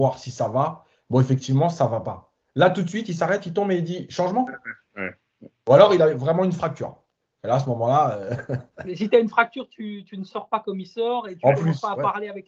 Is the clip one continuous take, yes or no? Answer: yes